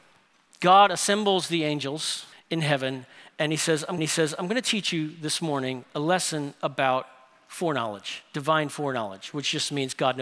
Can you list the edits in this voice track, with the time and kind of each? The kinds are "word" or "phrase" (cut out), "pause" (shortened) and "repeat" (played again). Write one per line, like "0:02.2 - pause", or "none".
0:02.3 - pause
0:04.0 - repeat